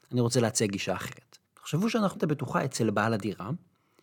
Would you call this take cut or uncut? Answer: cut